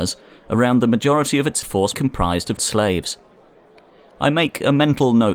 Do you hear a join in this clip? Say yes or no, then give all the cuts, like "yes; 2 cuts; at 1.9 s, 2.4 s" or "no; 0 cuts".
yes; 3 cuts; at 1.6 s, 1.9 s, 2.6 s